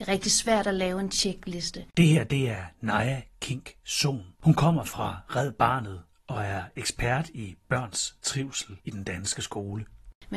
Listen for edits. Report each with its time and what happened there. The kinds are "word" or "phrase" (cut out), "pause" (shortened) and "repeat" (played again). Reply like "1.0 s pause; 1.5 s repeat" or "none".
4.3 s pause; 8.8 s pause